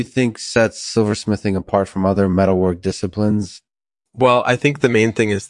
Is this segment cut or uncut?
uncut